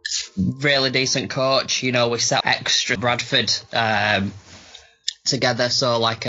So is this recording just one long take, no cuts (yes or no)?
no